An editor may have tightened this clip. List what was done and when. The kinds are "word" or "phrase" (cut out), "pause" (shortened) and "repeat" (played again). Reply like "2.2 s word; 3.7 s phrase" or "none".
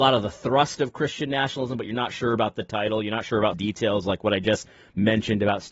3.5 s phrase